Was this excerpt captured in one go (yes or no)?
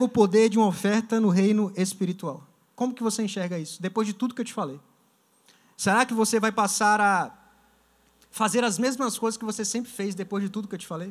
yes